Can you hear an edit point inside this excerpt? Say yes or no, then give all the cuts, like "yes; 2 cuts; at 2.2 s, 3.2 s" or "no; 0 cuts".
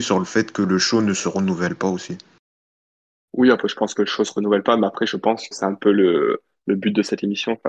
yes; 1 cut; at 5.5 s